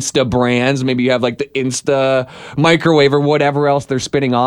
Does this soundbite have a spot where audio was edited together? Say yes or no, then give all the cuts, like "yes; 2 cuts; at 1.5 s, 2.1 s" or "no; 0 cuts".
no; 0 cuts